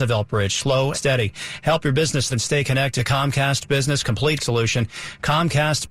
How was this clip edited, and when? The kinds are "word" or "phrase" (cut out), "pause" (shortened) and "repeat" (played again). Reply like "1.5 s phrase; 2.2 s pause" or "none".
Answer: 0.9 s word; 2.3 s word; 3.0 s word; 4.4 s word